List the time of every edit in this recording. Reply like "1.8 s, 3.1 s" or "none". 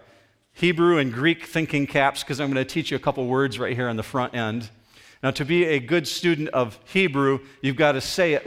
none